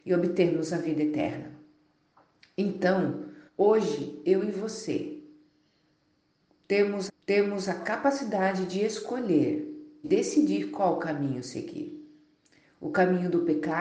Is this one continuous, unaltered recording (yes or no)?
no